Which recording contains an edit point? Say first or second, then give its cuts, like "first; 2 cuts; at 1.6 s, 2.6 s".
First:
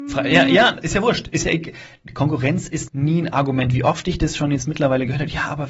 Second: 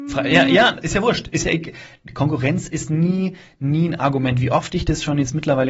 first; 1 cut; at 2.9 s